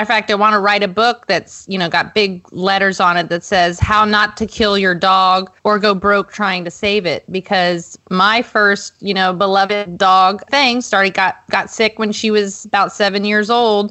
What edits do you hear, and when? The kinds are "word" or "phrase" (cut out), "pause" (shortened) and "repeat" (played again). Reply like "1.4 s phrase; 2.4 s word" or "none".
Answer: 5.6 s pause; 10.5 s phrase